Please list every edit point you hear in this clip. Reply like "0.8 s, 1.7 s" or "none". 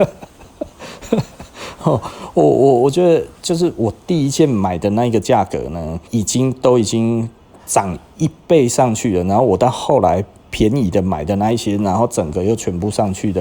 1.8 s, 6.1 s